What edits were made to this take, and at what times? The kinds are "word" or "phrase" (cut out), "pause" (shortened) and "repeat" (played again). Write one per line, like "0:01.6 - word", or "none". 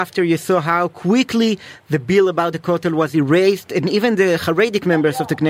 none